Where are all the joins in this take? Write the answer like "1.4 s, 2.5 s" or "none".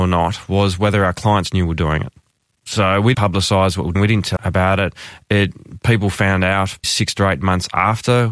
3.1 s, 4.0 s, 4.4 s, 6.8 s

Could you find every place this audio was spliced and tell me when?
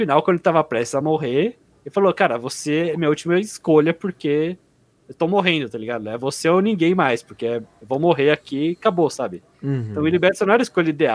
none

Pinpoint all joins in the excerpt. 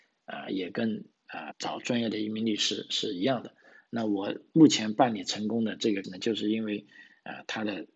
1.5 s, 6.0 s

